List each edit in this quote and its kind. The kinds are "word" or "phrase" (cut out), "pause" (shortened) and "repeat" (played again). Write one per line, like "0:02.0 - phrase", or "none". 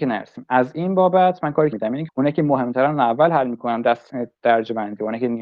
0:01.7 - word
0:02.1 - phrase